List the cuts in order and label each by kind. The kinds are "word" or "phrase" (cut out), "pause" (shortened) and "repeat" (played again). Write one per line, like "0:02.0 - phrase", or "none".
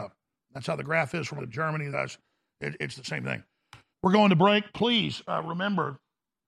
0:01.4 - word
0:01.9 - word
0:03.9 - pause

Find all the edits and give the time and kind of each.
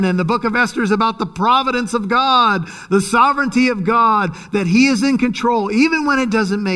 none

